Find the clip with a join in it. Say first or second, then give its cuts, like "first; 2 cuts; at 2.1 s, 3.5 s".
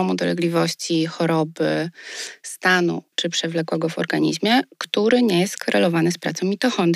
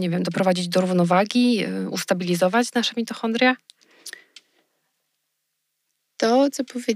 first; 1 cut; at 3.1 s